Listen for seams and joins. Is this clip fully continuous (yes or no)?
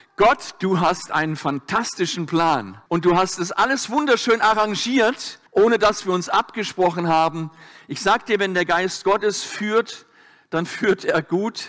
no